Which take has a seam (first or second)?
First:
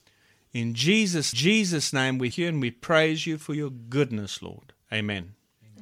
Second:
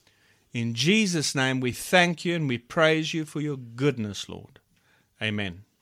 first